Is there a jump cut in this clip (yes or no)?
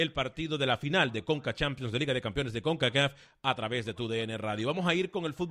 no